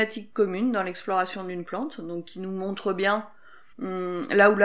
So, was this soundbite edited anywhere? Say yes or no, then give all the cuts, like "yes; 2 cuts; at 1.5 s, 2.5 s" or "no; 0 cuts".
yes; 1 cut; at 3.7 s